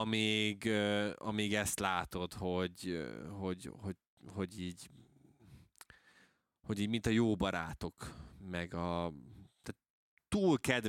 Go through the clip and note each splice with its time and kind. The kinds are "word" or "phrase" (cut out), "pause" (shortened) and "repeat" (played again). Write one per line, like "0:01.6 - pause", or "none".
none